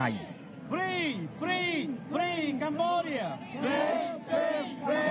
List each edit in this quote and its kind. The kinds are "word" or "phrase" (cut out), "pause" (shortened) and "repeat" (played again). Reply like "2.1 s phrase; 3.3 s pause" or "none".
none